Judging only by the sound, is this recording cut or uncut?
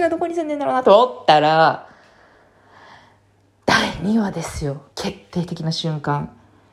cut